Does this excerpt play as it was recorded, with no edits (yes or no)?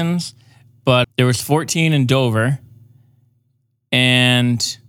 no